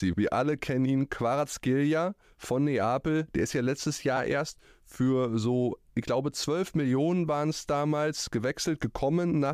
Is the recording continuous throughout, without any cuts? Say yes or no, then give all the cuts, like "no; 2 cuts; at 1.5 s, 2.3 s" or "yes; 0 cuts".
yes; 0 cuts